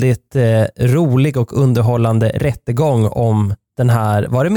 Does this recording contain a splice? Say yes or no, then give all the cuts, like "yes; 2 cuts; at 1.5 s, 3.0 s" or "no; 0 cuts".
no; 0 cuts